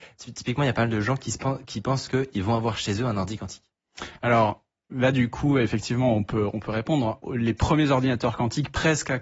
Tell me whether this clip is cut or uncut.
uncut